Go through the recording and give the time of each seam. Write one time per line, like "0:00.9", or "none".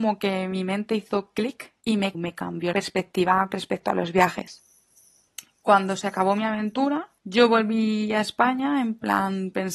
0:01.8
0:02.1
0:02.7
0:03.5
0:07.2